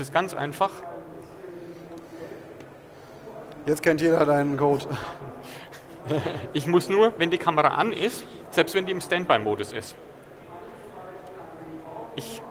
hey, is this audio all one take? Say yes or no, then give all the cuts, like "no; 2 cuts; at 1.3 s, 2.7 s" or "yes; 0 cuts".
yes; 0 cuts